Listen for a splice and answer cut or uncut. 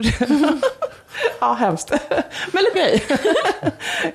cut